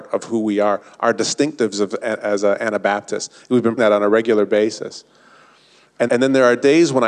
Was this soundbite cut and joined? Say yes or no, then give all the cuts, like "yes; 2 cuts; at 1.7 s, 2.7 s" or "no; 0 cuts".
yes; 2 cuts; at 3.8 s, 6.1 s